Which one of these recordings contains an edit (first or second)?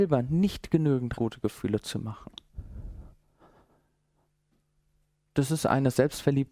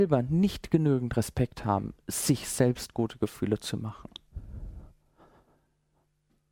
first